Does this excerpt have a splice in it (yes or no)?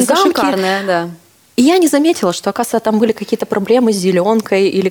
no